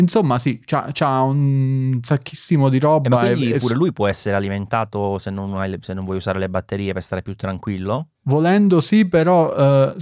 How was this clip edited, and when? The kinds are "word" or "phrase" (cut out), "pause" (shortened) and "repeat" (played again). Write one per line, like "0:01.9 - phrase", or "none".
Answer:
0:08.1 - pause